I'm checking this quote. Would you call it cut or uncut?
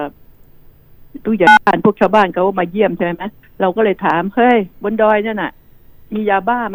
cut